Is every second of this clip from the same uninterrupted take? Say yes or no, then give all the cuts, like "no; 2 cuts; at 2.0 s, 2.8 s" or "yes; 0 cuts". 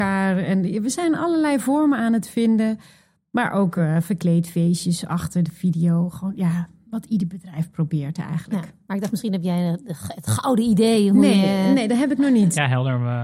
yes; 0 cuts